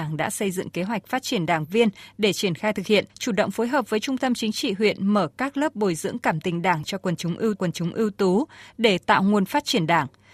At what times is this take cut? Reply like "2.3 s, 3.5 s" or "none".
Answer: 3.1 s, 7.6 s